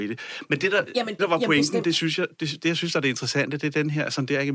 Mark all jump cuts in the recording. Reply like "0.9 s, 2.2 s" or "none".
1.2 s